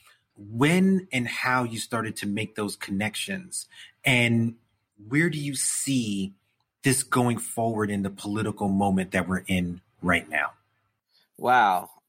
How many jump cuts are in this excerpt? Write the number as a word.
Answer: zero